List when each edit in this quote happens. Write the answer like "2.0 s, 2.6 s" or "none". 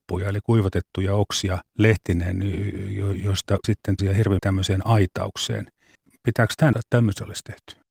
1.7 s, 3.6 s, 4.0 s, 4.4 s, 5.9 s, 6.7 s